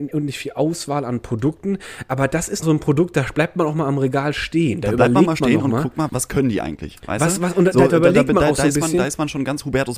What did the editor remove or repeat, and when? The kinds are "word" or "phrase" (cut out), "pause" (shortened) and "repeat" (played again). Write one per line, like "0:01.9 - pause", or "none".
0:02.6 - word
0:06.1 - word